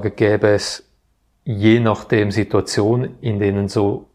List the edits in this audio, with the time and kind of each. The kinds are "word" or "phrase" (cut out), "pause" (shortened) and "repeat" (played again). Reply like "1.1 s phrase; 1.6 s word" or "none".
none